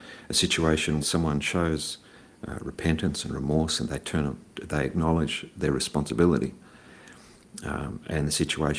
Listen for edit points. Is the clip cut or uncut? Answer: cut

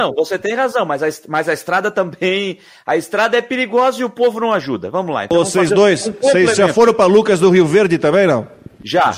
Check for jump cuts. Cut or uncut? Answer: uncut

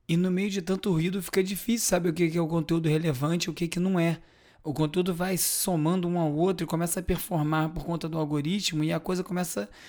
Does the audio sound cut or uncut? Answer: uncut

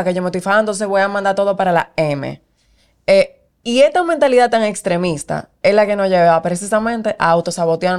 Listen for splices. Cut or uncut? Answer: cut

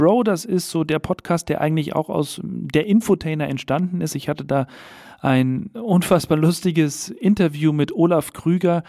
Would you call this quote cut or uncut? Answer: uncut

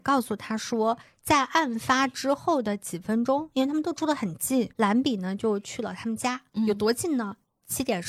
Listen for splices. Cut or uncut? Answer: cut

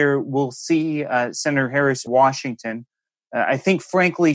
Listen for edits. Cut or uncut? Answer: cut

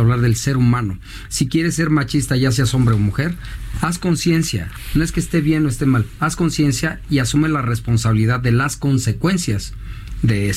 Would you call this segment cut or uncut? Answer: uncut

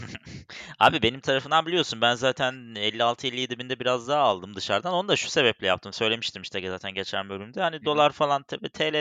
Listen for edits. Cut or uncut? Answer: uncut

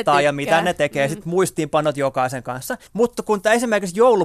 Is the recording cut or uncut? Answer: cut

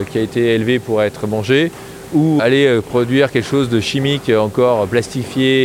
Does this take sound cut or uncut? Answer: cut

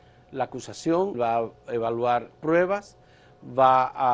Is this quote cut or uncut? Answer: cut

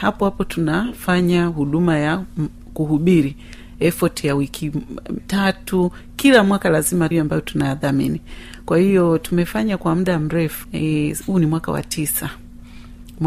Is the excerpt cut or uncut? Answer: cut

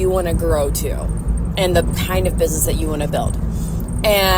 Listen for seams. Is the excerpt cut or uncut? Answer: uncut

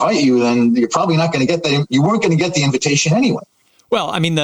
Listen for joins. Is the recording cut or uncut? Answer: uncut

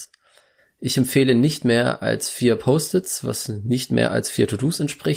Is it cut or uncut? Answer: uncut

